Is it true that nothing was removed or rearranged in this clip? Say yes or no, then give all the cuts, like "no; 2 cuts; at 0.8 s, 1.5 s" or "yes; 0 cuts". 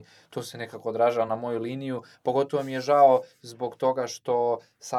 yes; 0 cuts